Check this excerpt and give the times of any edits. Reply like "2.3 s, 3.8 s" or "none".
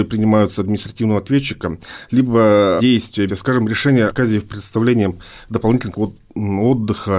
2.8 s, 3.3 s, 4.1 s, 5.9 s

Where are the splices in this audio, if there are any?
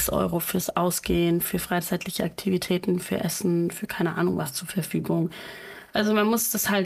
none

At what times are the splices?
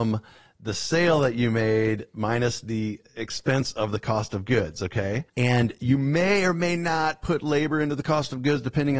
5.3 s

